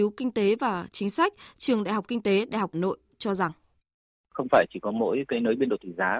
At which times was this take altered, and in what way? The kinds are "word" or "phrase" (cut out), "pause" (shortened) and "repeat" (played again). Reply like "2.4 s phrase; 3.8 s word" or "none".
2.7 s phrase